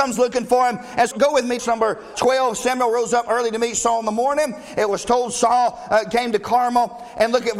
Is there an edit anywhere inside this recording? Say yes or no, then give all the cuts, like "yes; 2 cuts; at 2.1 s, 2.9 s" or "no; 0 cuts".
yes; 3 cuts; at 1.1 s, 1.6 s, 2.1 s